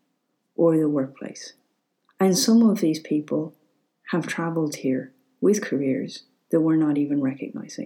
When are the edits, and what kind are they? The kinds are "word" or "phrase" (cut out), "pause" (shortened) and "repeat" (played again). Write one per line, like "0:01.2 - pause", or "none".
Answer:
none